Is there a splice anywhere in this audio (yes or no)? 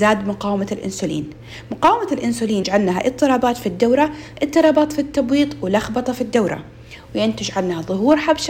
yes